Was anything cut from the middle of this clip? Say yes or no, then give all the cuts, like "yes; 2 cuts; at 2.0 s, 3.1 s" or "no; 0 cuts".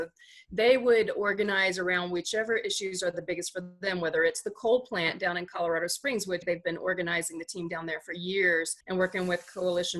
yes; 2 cuts; at 6.4 s, 8.8 s